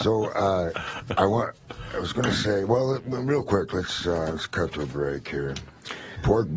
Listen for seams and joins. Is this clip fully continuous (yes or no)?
yes